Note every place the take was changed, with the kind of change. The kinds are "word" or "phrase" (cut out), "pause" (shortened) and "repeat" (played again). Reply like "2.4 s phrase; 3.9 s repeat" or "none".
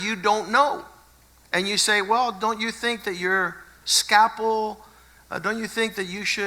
none